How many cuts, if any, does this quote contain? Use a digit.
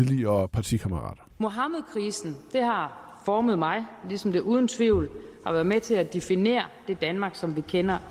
1